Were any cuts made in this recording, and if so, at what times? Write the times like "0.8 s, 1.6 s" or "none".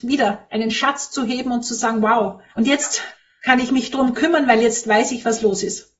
2.5 s